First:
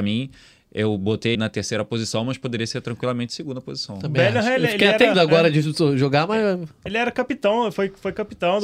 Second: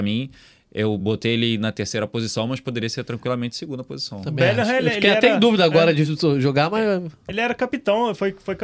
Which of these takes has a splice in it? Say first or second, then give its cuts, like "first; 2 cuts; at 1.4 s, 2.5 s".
first; 2 cuts; at 1.3 s, 5.1 s